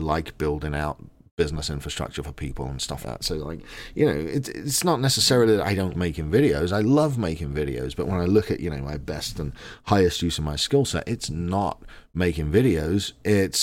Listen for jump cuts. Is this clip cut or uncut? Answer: cut